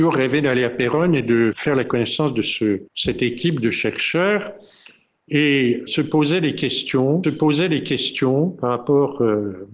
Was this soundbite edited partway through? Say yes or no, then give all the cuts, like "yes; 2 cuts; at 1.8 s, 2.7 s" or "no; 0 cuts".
yes; 4 cuts; at 1.5 s, 2.9 s, 5.9 s, 7.2 s